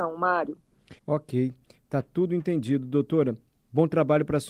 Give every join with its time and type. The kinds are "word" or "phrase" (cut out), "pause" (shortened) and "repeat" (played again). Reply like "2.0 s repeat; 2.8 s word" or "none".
1.0 s pause